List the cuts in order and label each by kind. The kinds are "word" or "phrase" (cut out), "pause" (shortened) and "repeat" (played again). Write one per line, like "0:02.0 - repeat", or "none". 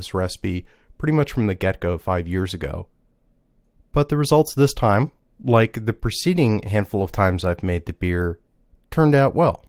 none